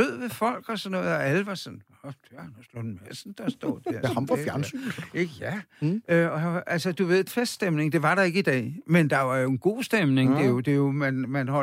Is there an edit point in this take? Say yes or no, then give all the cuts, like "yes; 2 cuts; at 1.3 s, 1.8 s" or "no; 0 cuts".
yes; 1 cut; at 7.3 s